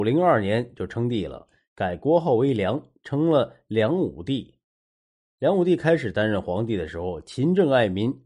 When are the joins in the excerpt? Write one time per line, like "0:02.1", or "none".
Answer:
none